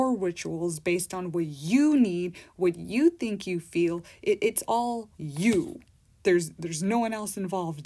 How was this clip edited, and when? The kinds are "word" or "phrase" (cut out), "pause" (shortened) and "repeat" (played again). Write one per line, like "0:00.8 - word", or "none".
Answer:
0:05.1 - pause